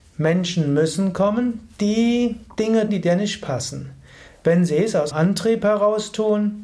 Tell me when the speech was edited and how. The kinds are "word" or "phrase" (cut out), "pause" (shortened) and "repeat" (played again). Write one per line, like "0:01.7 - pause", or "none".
0:02.9 - word
0:05.1 - word